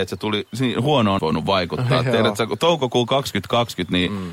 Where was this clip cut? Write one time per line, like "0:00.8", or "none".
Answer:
0:01.2